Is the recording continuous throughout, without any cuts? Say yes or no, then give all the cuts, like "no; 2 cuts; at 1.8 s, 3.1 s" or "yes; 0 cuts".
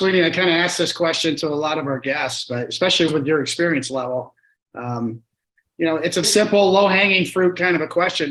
no; 2 cuts; at 3.1 s, 6.2 s